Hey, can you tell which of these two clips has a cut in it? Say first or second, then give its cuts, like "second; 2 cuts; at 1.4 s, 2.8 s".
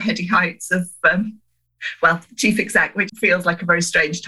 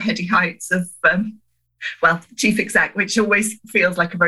first; 1 cut; at 3.1 s